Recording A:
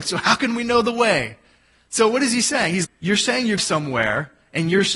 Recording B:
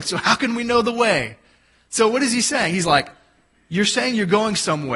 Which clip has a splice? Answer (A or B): A